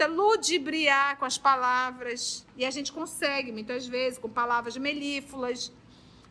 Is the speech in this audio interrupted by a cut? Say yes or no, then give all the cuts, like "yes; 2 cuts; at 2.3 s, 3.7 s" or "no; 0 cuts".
no; 0 cuts